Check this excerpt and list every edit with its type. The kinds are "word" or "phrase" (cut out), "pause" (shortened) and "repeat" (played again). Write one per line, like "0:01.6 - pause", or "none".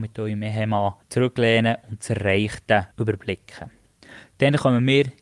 0:01.0 - pause
0:02.9 - pause